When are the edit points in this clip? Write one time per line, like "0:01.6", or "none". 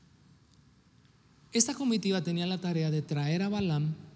none